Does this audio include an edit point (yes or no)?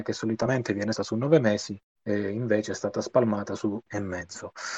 yes